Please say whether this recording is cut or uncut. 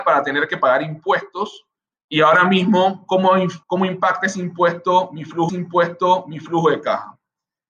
cut